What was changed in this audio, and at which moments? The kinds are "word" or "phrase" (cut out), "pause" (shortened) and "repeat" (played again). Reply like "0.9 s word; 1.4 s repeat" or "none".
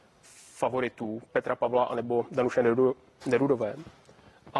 1.3 s word